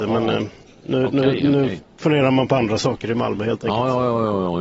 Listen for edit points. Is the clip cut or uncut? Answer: uncut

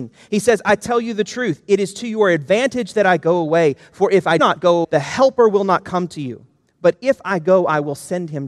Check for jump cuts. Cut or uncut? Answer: cut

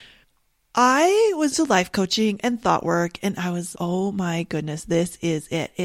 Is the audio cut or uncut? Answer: cut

